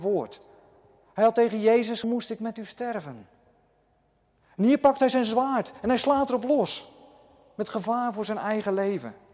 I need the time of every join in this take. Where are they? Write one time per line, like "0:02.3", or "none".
0:02.0